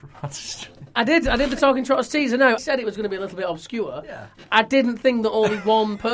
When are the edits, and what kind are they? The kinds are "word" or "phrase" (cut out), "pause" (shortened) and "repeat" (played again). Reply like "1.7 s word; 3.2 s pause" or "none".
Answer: 2.6 s word